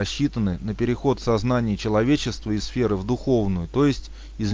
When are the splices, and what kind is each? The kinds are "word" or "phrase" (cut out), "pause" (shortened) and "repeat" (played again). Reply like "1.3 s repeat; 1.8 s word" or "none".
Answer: 2.6 s word